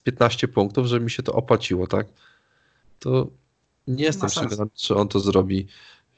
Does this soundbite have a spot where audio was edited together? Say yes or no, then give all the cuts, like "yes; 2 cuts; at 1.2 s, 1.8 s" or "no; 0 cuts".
no; 0 cuts